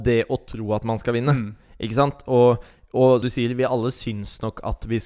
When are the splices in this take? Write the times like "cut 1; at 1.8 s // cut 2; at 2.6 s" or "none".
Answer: cut 1; at 3.2 s